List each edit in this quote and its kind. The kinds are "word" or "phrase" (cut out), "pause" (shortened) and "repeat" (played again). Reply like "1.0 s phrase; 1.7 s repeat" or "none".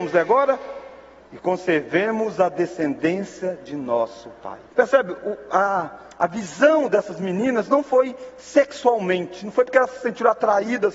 1.2 s pause; 4.7 s pause